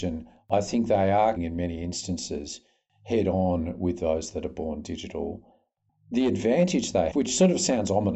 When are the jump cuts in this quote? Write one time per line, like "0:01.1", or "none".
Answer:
0:01.4
0:07.1